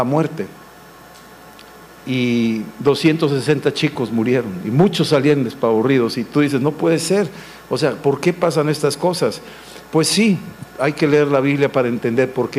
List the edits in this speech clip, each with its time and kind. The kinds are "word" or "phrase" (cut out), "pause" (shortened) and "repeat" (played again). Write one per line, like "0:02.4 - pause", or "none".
none